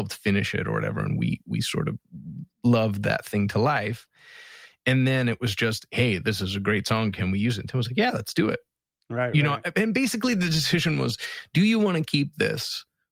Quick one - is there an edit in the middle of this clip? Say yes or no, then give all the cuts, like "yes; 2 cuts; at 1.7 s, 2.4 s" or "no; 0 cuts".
yes; 1 cut; at 2.5 s